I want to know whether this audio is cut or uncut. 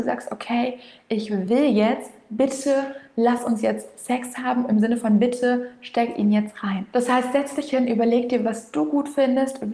uncut